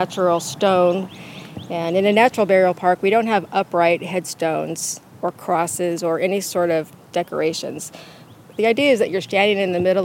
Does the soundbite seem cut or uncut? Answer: cut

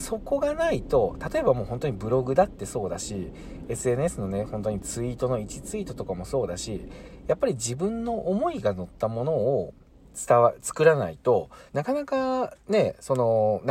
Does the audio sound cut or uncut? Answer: cut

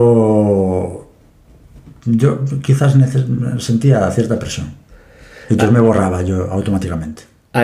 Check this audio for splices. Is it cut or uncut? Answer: uncut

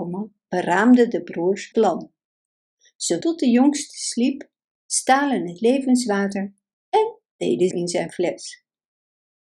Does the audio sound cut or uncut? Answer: cut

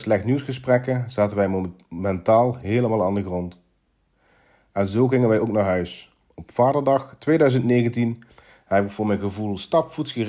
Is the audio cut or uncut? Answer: uncut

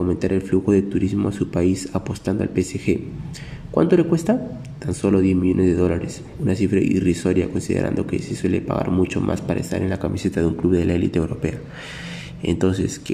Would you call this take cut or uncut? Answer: uncut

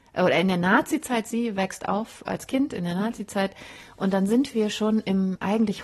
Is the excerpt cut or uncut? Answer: uncut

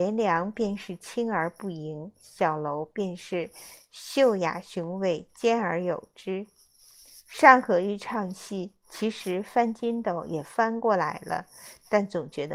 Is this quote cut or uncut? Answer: uncut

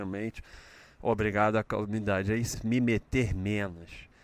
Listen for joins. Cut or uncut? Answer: cut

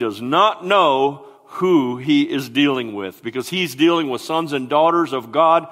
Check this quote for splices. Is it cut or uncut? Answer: uncut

